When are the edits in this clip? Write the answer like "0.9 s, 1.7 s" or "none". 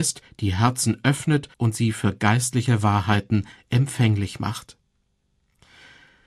1.5 s